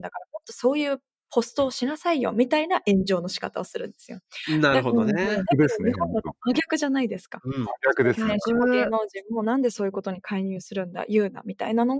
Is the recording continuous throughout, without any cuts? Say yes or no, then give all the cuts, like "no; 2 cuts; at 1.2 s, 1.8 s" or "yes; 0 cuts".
yes; 0 cuts